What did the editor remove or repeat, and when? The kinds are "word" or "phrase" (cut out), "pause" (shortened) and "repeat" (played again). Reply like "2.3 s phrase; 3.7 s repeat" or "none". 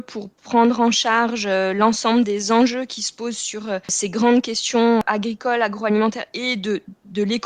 3.8 s pause